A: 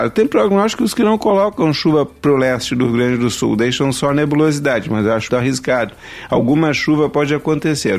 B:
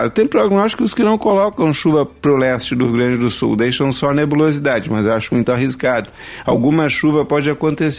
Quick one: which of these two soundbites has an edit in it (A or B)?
A